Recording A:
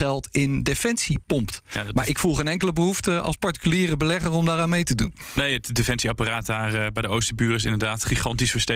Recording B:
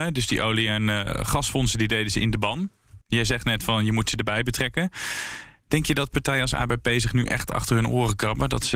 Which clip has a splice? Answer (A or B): B